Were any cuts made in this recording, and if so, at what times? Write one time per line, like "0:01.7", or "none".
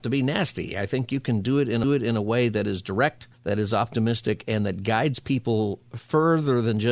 0:01.8
0:03.3